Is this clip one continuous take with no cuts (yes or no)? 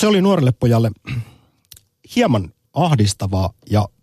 yes